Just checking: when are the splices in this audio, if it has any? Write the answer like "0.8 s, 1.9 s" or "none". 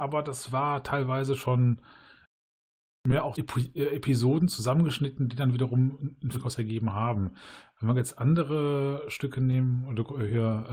3.3 s, 6.3 s